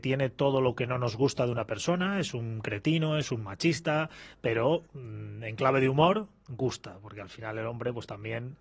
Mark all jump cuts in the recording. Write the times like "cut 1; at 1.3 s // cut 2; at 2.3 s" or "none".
cut 1; at 4.9 s